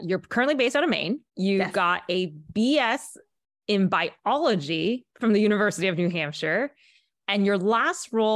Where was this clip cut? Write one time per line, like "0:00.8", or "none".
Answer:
0:01.3
0:05.1